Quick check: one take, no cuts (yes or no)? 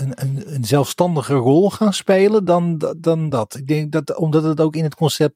yes